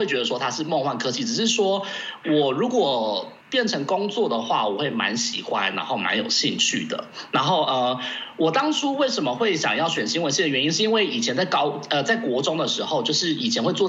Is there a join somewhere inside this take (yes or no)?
yes